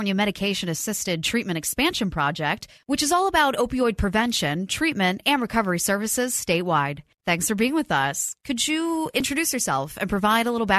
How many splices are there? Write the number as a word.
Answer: zero